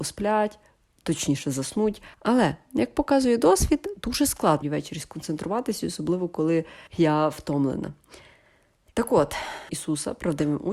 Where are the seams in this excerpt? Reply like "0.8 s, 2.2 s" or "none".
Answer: 2.1 s, 4.6 s, 6.9 s, 9.7 s